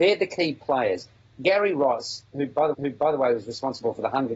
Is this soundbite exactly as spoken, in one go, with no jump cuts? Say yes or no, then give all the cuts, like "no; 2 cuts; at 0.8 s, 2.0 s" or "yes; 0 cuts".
no; 1 cut; at 2.7 s